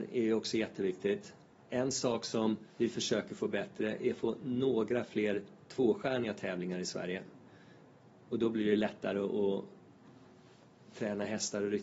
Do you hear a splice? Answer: yes; 1 cut; at 2.7 s

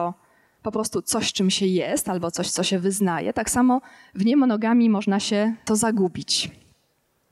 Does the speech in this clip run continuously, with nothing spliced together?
no; 1 cut; at 5.7 s

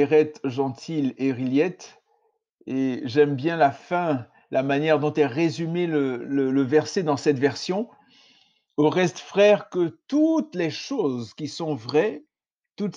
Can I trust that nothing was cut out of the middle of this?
yes; 0 cuts

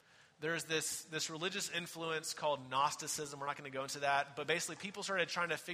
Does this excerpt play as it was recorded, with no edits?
yes; 0 cuts

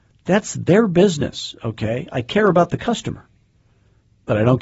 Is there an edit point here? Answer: no; 0 cuts

